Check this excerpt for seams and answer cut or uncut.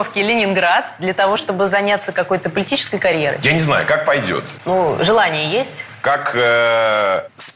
uncut